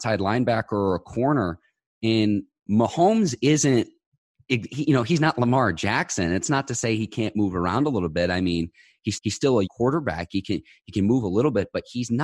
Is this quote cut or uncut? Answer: cut